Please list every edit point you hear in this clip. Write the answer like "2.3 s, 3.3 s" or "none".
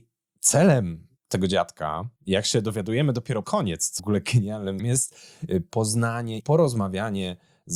1.2 s, 2.2 s, 3.4 s, 4.0 s, 4.8 s, 6.4 s